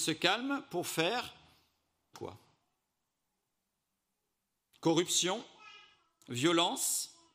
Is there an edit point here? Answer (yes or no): yes